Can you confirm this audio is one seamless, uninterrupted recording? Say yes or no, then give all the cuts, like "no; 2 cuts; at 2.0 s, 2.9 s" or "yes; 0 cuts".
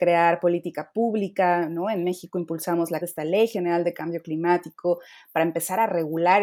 no; 1 cut; at 3.0 s